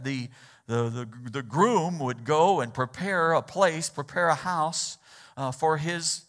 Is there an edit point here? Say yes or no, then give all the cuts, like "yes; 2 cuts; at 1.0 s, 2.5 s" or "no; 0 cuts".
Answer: no; 0 cuts